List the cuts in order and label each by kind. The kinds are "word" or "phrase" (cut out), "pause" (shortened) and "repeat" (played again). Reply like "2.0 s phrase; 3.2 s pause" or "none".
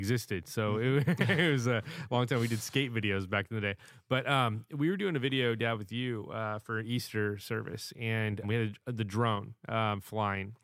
8.4 s word